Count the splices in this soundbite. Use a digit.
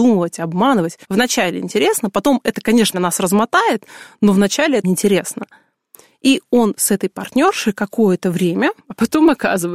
4